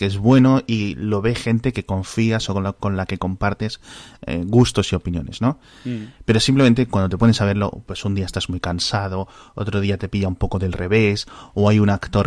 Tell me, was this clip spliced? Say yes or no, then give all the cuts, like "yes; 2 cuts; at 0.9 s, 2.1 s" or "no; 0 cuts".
no; 0 cuts